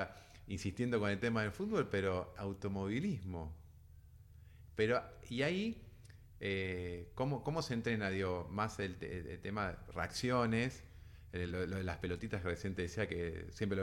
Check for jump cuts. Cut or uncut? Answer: uncut